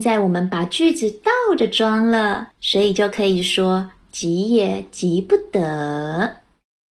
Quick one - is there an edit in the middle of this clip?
yes; 1 cut; at 2.5 s

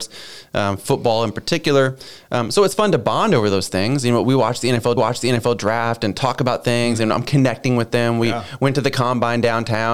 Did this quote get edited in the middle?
yes; 1 cut; at 5.0 s

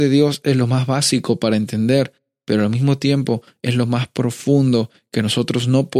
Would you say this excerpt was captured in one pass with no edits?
yes; 0 cuts

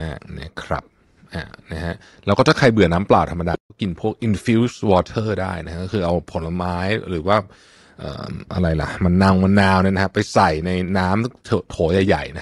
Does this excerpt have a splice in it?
no; 0 cuts

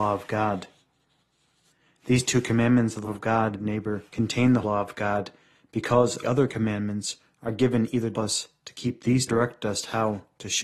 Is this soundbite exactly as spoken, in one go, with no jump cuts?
no; 7 cuts; at 3.0 s, 3.5 s, 4.1 s, 4.6 s, 6.2 s, 8.1 s, 9.3 s

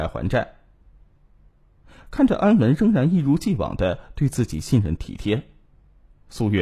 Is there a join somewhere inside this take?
no; 0 cuts

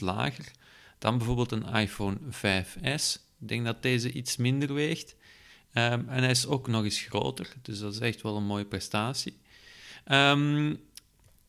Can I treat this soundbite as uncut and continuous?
yes; 0 cuts

